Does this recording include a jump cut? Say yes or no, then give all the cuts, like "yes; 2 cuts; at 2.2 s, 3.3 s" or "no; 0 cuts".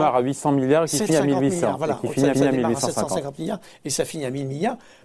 yes; 2 cuts; at 1.1 s, 2.3 s